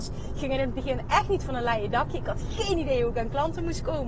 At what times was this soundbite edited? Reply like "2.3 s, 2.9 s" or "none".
none